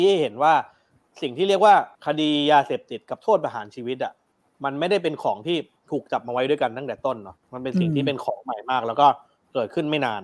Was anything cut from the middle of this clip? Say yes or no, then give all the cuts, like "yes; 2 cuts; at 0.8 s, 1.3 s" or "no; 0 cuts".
yes; 2 cuts; at 1.9 s, 7.4 s